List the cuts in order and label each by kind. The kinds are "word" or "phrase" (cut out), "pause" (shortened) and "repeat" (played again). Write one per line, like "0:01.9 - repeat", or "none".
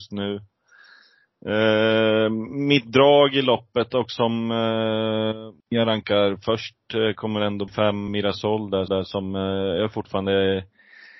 0:05.6 - pause
0:07.7 - word
0:08.1 - word
0:08.9 - repeat

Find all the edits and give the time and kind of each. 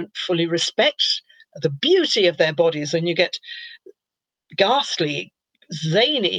none

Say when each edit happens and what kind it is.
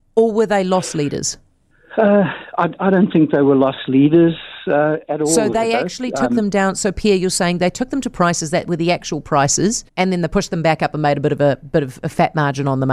0:01.7 - pause
0:09.9 - pause

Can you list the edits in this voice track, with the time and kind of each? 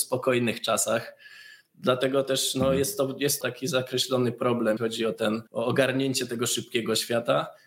0:03.4 - phrase
0:04.8 - word
0:05.5 - pause

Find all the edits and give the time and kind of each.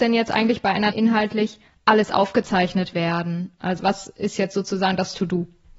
0:00.9 - word
0:03.8 - word

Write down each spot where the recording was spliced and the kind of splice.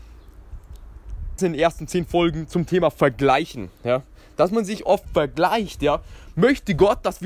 0:01.4 - phrase
0:03.7 - pause
0:04.9 - word

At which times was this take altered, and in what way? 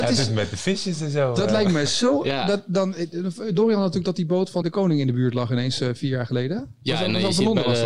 0:04.6 - word

